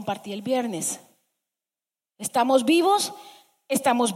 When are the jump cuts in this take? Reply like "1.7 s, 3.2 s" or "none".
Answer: none